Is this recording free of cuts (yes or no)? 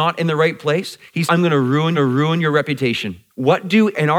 no